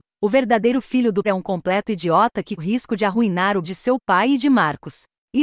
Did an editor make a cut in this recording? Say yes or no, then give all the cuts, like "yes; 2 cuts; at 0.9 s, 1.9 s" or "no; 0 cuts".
yes; 3 cuts; at 1.2 s, 2.6 s, 3.6 s